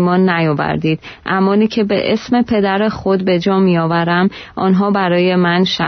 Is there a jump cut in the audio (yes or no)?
no